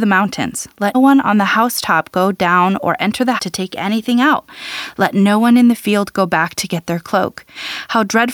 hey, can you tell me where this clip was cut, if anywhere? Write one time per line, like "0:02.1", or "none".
0:00.9
0:03.4